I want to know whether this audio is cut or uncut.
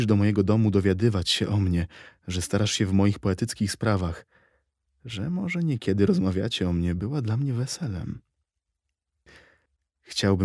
uncut